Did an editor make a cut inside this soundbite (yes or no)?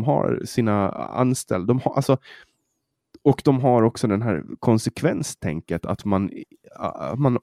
no